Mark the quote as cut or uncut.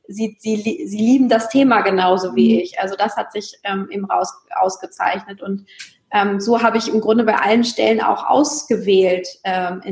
uncut